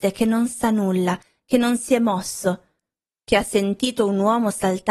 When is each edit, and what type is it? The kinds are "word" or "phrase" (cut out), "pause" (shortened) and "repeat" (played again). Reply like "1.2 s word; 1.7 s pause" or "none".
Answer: none

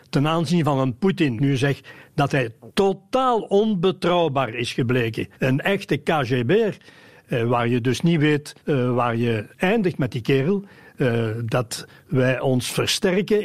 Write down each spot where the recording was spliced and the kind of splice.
1.4 s phrase; 5.3 s pause; 8.6 s pause

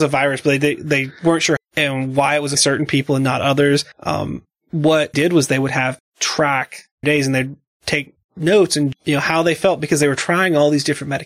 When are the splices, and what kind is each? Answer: 1.6 s word; 2.5 s word; 3.9 s pause; 5.1 s word; 6.0 s word; 7.0 s word; 8.2 s pause; 8.9 s word

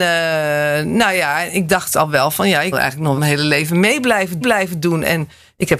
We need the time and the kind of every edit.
2.7 s word; 3.2 s word; 4.4 s repeat

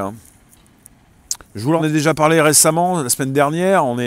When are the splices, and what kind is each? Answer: 1.4 s pause; 1.8 s phrase

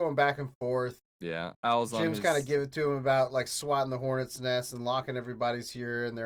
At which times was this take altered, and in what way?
1.5 s word

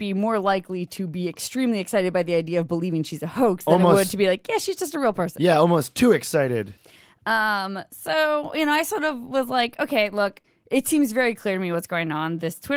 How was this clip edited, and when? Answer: none

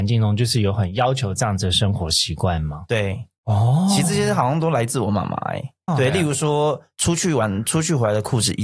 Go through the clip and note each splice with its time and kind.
5.9 s word

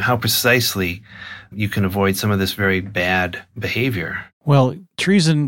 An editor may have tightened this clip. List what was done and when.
1.5 s word; 2.8 s word; 4.3 s pause

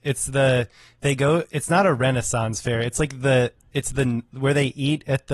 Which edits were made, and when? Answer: none

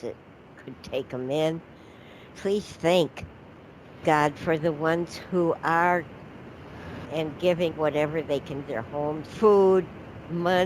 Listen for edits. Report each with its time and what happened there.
2.3 s word; 4.0 s word; 7.0 s word; 7.7 s word; 8.7 s word; 9.3 s word

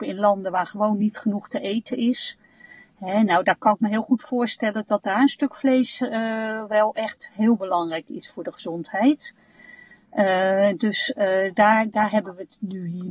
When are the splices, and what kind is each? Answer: none

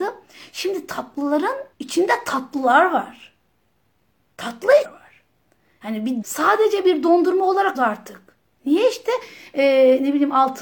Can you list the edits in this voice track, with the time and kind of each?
1.7 s pause; 4.8 s phrase; 6.2 s word; 7.7 s word

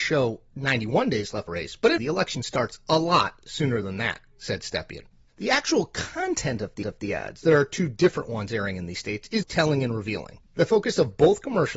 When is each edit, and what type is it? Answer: 1.5 s phrase; 2.0 s word; 5.2 s pause; 6.8 s repeat; 9.4 s word; 10.5 s pause

